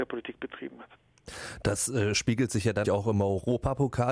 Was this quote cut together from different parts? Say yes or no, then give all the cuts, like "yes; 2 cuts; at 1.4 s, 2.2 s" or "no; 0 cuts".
yes; 1 cut; at 2.8 s